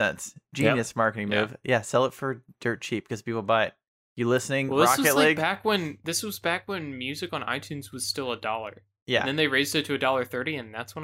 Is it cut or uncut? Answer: uncut